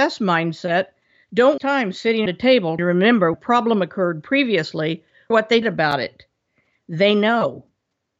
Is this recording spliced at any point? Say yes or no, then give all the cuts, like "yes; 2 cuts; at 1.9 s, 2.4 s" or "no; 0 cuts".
yes; 6 cuts; at 1.6 s, 2.3 s, 2.8 s, 3.3 s, 5.3 s, 5.6 s